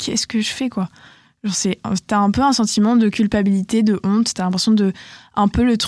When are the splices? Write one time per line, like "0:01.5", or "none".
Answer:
none